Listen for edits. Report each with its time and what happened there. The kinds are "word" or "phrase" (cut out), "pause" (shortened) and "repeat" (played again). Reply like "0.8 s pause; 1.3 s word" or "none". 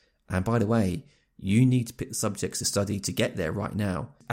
none